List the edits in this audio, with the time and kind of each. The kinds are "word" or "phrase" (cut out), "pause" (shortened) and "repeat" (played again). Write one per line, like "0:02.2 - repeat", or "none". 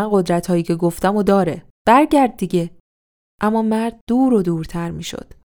none

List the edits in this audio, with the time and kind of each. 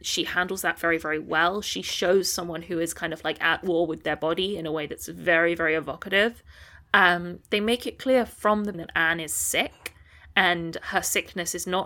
0:08.7 - word

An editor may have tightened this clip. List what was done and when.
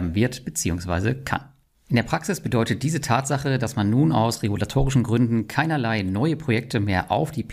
none

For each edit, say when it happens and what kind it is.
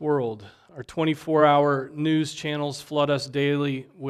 none

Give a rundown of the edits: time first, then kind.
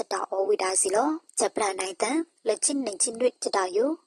0:01.3 - pause

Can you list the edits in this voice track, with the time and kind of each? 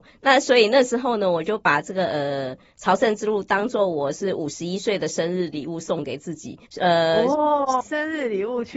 0:06.7 - pause
0:07.8 - word

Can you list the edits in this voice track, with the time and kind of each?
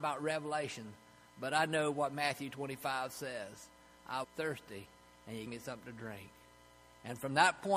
0:04.2 - word
0:05.5 - word

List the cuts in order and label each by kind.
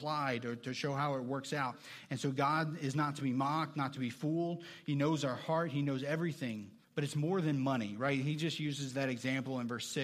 0:06.8 - pause

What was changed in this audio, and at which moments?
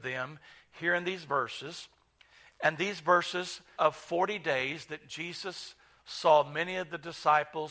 0:03.8 - word

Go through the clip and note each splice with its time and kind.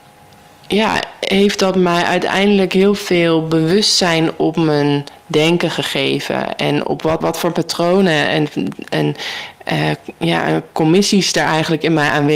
0:07.2 - word

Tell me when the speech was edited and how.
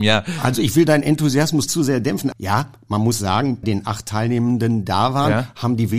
0:01.7 - word
0:02.3 - word
0:03.6 - word
0:04.9 - word

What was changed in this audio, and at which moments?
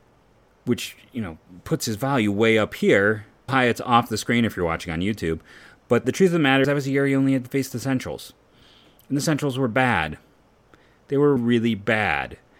0:03.5 - word
0:06.0 - word
0:06.6 - word
0:11.4 - word

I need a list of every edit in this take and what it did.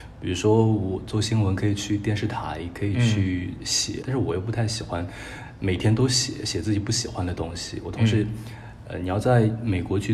0:04.0 - word

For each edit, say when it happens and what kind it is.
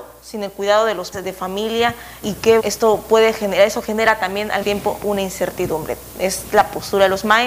0:01.1 - word
0:02.2 - word
0:02.6 - word
0:04.6 - word

